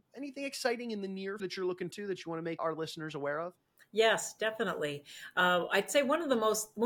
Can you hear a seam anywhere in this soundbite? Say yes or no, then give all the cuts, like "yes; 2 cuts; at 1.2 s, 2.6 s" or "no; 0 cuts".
yes; 3 cuts; at 1.4 s, 1.9 s, 2.6 s